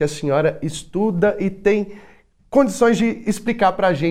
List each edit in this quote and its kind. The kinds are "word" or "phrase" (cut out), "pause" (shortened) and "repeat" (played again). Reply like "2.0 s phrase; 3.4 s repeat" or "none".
none